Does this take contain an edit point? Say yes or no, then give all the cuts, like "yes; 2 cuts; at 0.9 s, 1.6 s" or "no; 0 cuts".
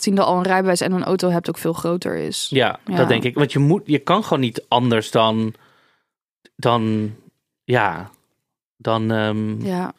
no; 0 cuts